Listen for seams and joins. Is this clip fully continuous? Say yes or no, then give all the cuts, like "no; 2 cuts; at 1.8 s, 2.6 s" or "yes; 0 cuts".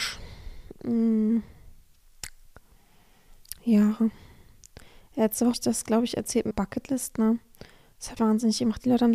no; 3 cuts; at 5.5 s, 6.5 s, 8.2 s